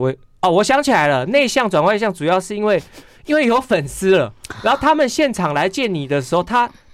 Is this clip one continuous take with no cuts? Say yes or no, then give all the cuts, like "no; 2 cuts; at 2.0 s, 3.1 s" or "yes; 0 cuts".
yes; 0 cuts